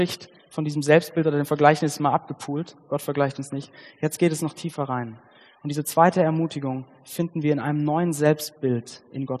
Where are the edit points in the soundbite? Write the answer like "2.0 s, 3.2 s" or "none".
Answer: none